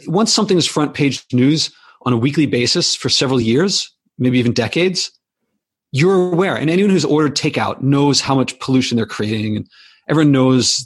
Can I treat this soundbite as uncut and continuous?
yes; 0 cuts

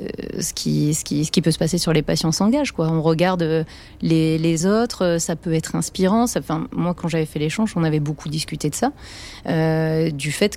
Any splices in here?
yes; 1 cut; at 4.6 s

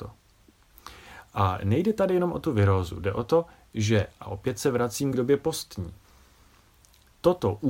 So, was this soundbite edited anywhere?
no; 0 cuts

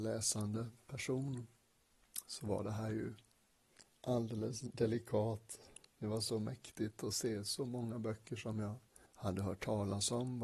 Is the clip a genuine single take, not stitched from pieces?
no; 2 cuts; at 5.9 s, 9.1 s

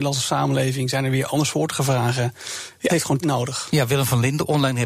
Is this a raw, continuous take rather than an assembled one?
no; 2 cuts; at 2.9 s, 3.2 s

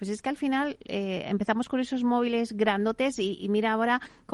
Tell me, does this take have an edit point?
no; 0 cuts

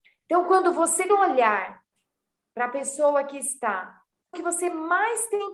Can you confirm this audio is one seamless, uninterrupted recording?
no; 2 cuts; at 1.1 s, 4.3 s

